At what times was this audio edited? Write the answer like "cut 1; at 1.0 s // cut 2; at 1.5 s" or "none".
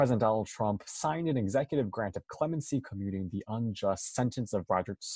none